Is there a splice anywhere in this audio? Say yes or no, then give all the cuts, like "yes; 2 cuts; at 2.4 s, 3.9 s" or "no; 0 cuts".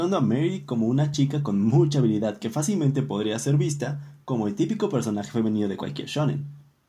no; 0 cuts